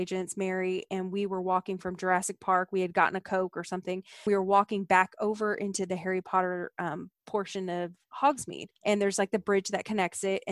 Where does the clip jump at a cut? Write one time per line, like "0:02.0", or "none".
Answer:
0:04.3
0:08.8